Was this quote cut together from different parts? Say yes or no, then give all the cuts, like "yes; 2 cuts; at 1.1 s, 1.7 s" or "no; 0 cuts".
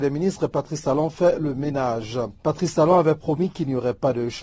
yes; 1 cut; at 2.4 s